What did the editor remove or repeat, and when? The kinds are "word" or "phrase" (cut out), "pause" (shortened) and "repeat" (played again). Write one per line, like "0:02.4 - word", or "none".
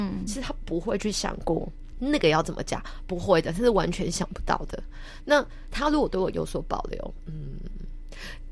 0:01.9 - word